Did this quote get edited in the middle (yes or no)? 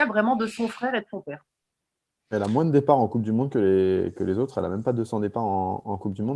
no